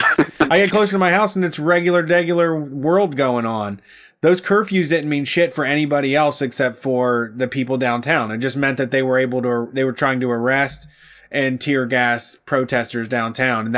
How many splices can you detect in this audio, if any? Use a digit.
0